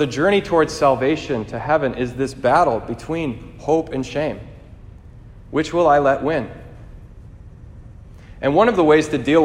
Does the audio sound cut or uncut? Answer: uncut